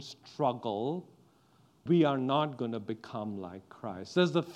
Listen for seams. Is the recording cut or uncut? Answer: cut